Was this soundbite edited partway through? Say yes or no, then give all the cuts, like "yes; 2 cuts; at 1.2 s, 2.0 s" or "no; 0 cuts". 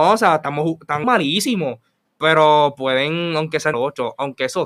yes; 2 cuts; at 1.0 s, 3.7 s